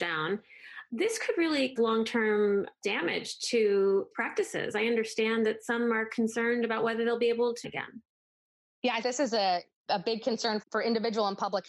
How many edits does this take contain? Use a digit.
5